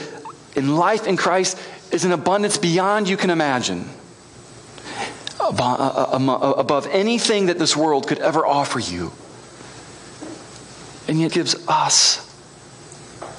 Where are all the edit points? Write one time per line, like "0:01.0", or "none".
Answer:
0:11.3